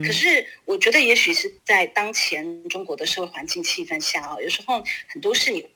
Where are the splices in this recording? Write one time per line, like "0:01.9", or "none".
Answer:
0:01.6